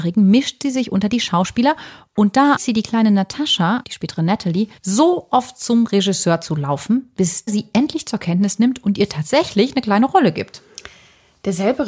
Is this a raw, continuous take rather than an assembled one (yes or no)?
no